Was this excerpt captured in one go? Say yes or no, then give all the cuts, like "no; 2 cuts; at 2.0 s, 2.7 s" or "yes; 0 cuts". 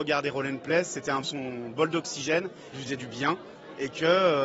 no; 2 cuts; at 1.2 s, 2.7 s